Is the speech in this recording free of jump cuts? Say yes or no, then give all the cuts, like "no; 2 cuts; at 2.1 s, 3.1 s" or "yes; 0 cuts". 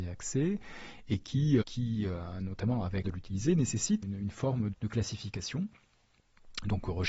no; 4 cuts; at 1.6 s, 3.0 s, 4.0 s, 4.7 s